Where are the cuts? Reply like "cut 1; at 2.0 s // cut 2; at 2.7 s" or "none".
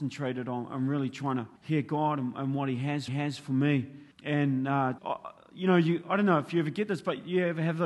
cut 1; at 1.6 s // cut 2; at 3.1 s // cut 3; at 4.1 s // cut 4; at 5.0 s